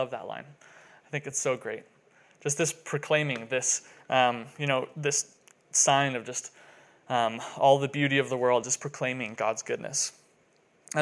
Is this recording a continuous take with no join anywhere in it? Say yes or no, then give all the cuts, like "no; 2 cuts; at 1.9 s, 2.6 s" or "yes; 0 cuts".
yes; 0 cuts